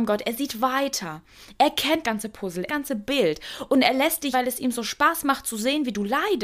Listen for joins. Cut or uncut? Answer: cut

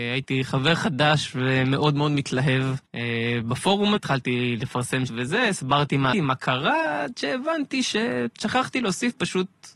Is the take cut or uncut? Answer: cut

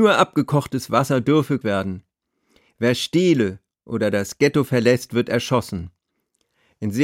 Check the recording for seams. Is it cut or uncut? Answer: cut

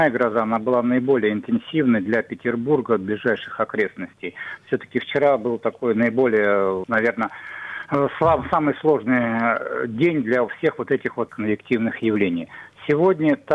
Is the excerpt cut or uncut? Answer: cut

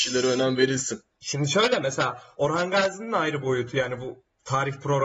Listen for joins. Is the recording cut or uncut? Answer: uncut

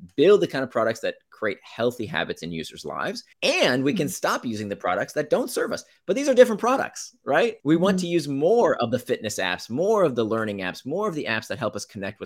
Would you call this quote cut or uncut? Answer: cut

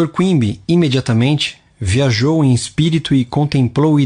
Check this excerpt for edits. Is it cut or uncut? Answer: uncut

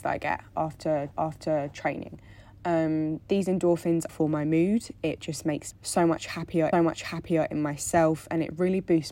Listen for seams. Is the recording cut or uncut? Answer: cut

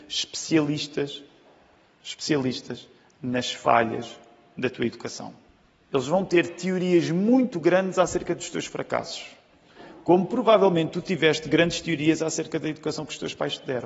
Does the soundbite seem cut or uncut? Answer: uncut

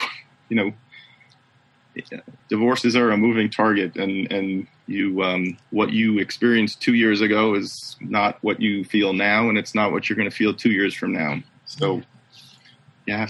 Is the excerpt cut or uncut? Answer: cut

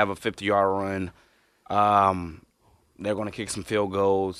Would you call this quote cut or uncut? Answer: uncut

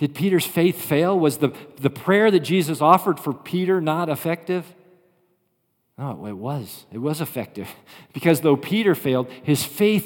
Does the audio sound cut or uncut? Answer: uncut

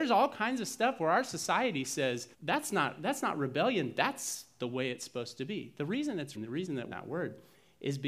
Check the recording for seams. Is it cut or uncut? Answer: cut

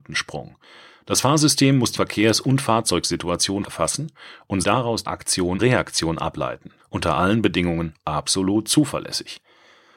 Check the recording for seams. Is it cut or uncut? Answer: cut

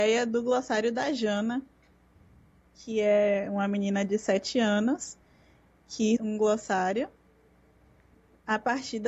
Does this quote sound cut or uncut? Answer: cut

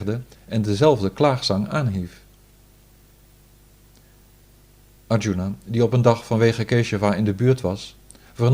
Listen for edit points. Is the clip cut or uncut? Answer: uncut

